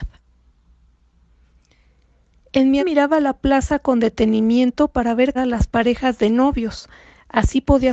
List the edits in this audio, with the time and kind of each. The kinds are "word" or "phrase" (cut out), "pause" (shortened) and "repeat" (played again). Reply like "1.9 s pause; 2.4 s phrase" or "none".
2.8 s word; 5.3 s word